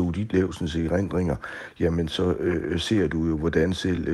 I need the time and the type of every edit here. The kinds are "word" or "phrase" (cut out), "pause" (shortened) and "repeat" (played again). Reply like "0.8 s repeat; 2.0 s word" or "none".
none